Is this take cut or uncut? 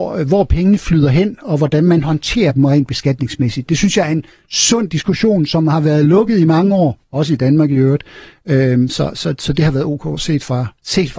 uncut